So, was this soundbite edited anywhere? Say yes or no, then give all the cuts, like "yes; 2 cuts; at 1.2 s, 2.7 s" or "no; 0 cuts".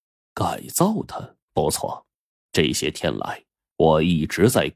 yes; 2 cuts; at 1.4 s, 2.2 s